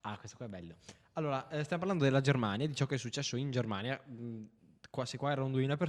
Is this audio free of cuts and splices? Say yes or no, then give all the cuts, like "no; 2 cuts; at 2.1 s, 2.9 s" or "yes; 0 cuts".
yes; 0 cuts